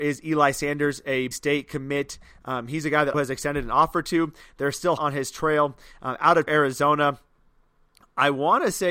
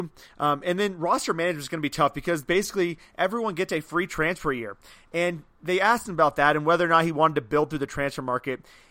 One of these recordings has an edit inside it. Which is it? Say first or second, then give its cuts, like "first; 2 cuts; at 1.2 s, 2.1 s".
first; 4 cuts; at 1.3 s, 3.1 s, 5.0 s, 6.5 s